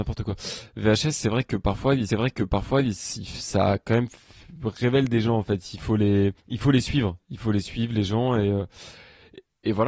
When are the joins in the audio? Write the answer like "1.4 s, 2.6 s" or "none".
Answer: 2.1 s, 6.4 s